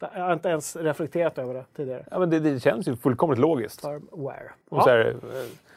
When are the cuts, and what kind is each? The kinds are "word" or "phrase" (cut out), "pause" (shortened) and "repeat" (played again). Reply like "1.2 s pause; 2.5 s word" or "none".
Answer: 4.6 s pause